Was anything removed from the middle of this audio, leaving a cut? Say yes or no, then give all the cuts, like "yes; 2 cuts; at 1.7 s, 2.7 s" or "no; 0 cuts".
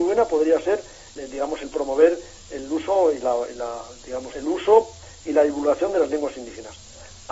yes; 2 cuts; at 1.2 s, 4.3 s